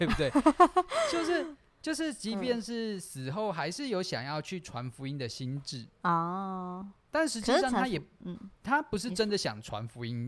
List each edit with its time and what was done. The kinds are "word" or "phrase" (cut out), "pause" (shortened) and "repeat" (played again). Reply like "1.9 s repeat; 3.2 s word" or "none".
5.9 s pause; 8.6 s pause